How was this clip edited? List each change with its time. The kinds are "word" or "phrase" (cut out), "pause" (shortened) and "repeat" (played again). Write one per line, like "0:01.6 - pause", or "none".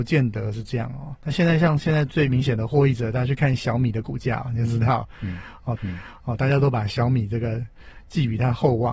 0:05.8 - repeat